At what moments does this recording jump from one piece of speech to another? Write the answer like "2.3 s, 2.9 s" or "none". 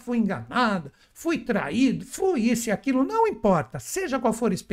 none